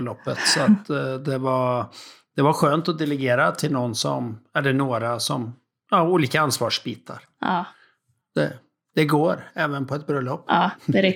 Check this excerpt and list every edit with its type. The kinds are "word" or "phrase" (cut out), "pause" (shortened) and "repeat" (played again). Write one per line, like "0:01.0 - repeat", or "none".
none